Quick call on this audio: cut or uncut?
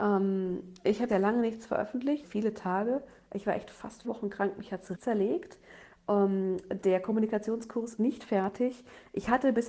cut